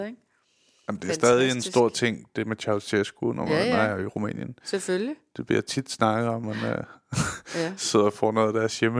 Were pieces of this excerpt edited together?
yes; 1 cut; at 6.4 s

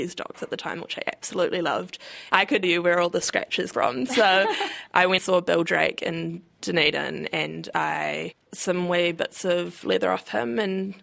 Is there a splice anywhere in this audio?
yes; 4 cuts; at 2.6 s, 3.7 s, 5.2 s, 8.5 s

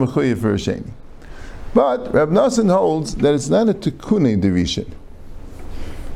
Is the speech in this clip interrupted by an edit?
no; 0 cuts

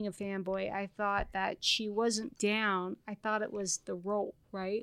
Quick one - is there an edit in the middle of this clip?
yes; 1 cut; at 2.3 s

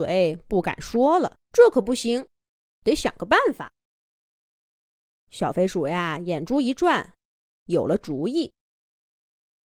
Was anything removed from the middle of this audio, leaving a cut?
yes; 1 cut; at 1.4 s

